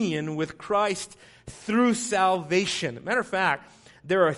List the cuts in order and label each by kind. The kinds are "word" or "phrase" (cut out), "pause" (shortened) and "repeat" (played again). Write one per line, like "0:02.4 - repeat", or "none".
none